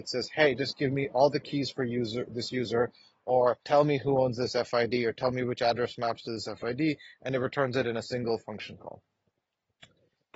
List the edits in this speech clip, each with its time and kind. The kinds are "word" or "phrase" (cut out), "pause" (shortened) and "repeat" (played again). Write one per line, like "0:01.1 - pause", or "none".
0:03.6 - pause